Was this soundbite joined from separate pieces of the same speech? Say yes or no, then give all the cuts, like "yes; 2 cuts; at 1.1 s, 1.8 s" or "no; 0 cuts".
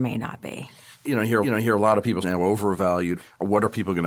yes; 2 cuts; at 1.4 s, 2.2 s